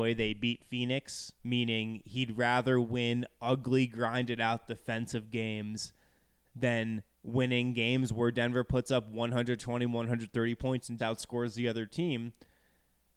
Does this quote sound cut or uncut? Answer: cut